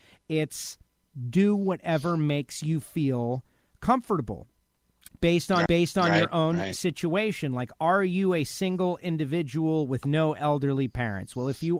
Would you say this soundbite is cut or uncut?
cut